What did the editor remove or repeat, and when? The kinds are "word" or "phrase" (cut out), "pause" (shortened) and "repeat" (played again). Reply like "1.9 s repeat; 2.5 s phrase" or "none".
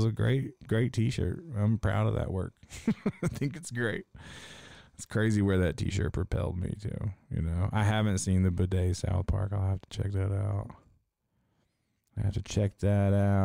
none